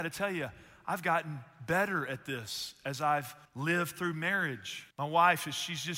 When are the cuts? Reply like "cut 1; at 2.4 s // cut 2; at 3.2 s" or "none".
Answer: cut 1; at 3.5 s // cut 2; at 4.9 s